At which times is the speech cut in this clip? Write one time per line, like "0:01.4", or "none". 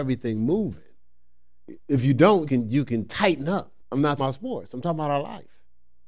0:01.8
0:02.5
0:03.8
0:04.2